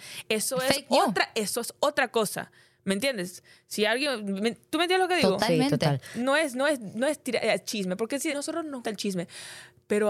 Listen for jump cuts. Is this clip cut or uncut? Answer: cut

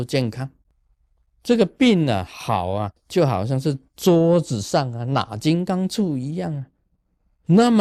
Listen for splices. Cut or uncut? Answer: cut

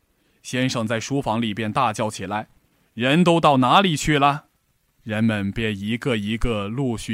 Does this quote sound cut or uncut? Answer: cut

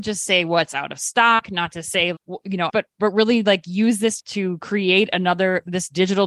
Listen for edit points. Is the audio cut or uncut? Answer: cut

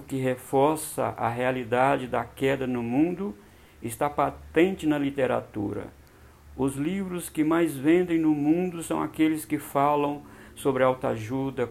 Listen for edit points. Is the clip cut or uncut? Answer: uncut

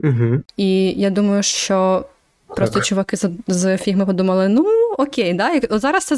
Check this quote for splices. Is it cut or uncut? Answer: uncut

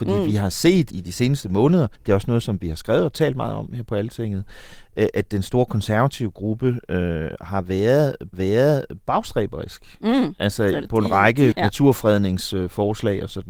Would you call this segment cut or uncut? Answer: cut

